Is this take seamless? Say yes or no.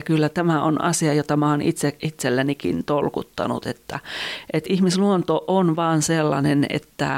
yes